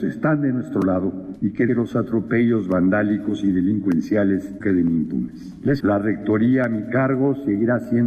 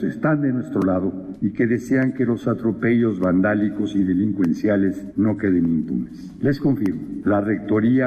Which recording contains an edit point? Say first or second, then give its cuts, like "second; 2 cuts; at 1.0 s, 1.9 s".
first; 3 cuts; at 1.7 s, 4.6 s, 5.8 s